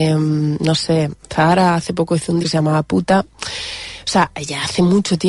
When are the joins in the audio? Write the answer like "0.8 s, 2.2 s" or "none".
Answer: 2.4 s